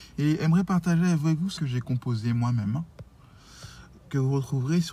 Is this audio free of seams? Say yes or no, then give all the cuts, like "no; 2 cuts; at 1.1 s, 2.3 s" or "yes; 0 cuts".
no; 1 cut; at 1.6 s